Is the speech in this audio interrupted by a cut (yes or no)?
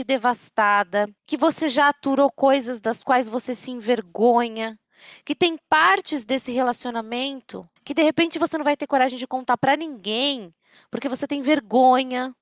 yes